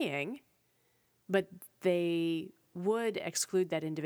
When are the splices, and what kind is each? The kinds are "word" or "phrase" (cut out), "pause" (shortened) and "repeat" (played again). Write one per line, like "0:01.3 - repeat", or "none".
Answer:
none